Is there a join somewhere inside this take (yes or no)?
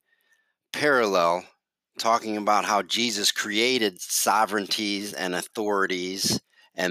no